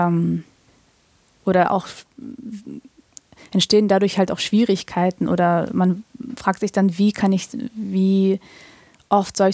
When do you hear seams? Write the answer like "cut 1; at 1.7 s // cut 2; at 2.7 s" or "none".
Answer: none